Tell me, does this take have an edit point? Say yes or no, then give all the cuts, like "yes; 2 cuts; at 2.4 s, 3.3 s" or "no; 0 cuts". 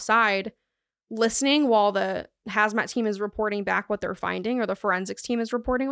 no; 0 cuts